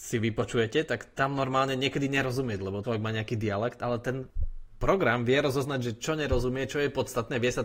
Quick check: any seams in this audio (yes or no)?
yes